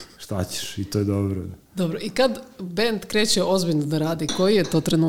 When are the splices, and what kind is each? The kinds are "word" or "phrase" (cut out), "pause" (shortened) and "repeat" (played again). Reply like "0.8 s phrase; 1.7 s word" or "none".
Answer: 1.6 s pause

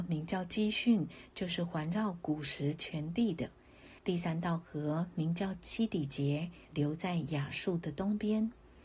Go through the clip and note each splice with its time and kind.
4.0 s pause; 6.6 s pause

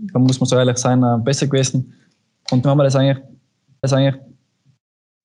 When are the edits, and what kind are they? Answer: 2.6 s word; 3.8 s repeat

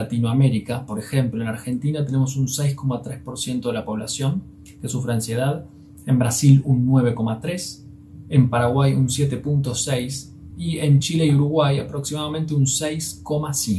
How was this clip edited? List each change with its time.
none

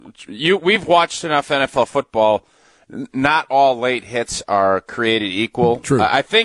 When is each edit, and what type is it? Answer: none

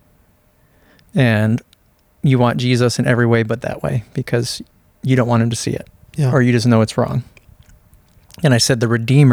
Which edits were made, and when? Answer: none

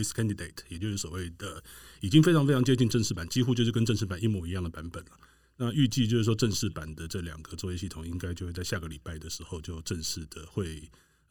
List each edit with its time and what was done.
none

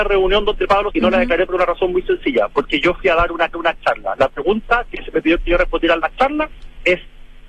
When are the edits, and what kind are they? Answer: 0.9 s word; 3.5 s repeat

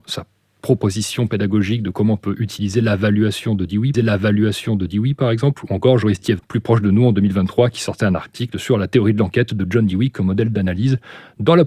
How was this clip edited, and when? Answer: 3.9 s repeat; 6.4 s word

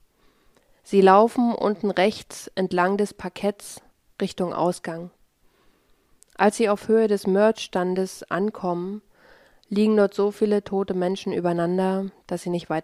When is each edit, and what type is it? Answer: none

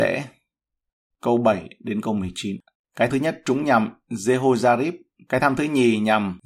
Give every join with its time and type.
3.1 s word

